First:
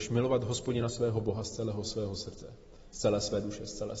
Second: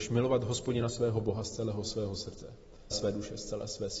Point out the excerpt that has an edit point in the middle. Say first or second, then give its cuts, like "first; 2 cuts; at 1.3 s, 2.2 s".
second; 1 cut; at 2.9 s